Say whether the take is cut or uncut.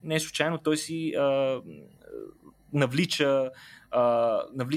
uncut